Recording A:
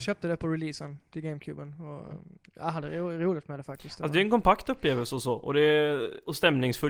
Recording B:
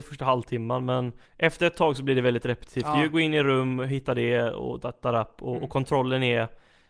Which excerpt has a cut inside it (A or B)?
B